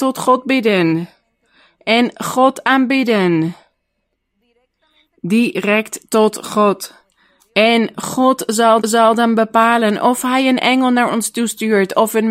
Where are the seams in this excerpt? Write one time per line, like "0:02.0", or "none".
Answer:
0:08.8